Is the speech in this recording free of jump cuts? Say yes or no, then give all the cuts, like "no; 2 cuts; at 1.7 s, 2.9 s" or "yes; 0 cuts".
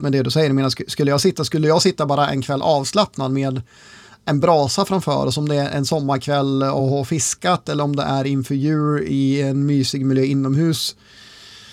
yes; 0 cuts